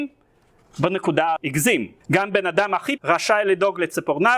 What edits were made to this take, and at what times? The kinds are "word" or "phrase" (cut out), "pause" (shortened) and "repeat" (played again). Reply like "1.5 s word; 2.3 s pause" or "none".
1.4 s word; 2.0 s pause; 3.0 s word